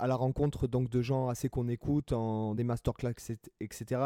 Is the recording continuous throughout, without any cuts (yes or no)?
no